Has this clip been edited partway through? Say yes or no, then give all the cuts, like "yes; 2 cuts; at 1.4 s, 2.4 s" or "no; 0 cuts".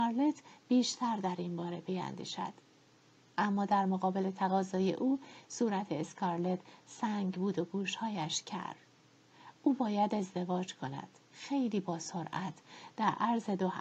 no; 0 cuts